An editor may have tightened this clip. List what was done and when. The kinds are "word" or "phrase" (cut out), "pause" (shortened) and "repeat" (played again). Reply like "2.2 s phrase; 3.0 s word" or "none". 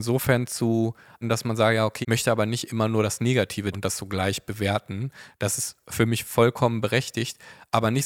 1.2 s word; 2.0 s phrase; 3.7 s phrase

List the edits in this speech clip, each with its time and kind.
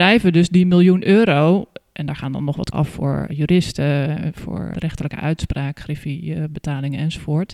2.7 s word; 3.3 s word; 4.7 s word

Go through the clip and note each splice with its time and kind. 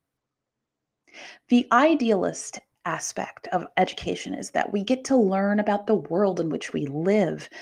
none

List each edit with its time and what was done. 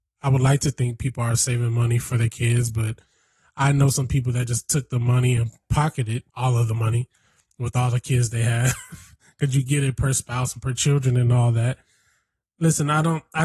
6.3 s pause

